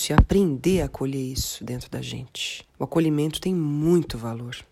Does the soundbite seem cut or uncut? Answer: cut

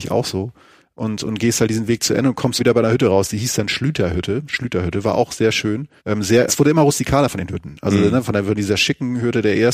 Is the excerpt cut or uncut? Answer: cut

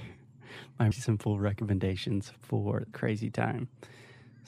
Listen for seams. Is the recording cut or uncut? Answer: cut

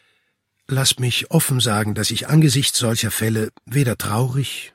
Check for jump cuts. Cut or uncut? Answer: uncut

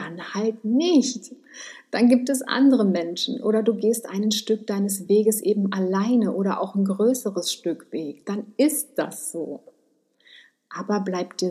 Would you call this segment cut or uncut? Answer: uncut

